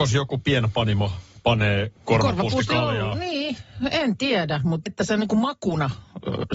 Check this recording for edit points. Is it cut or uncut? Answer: cut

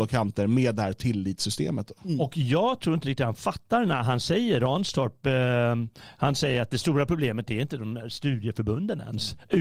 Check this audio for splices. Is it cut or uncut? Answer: uncut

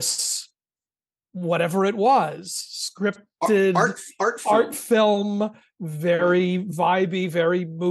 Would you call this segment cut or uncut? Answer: uncut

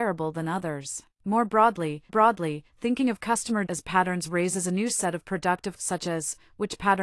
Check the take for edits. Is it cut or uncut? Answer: cut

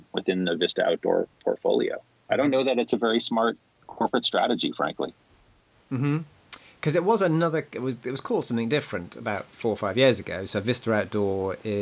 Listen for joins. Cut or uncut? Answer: uncut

